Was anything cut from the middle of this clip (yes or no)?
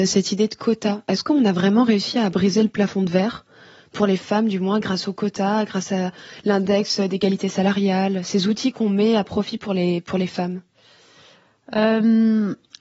no